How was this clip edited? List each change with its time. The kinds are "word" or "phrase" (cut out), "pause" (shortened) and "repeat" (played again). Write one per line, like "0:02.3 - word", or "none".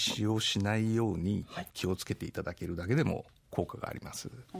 0:01.7 - pause